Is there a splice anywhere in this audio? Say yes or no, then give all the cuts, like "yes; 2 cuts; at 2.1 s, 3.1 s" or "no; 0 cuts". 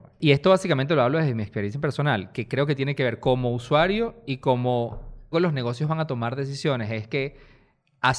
yes; 1 cut; at 5.3 s